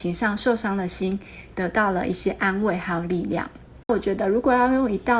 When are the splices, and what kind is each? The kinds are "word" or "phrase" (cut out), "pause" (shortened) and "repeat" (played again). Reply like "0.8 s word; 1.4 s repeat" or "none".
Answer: 3.8 s pause